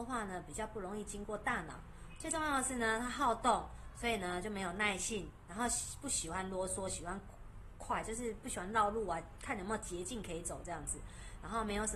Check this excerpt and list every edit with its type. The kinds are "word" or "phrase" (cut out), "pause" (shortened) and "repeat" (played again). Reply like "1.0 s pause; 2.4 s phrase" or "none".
none